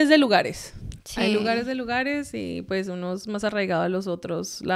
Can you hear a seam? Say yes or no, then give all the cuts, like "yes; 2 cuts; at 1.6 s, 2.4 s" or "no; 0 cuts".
no; 0 cuts